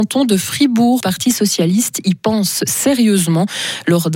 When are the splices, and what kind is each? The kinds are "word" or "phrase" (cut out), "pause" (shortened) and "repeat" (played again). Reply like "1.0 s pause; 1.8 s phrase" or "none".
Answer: 1.0 s word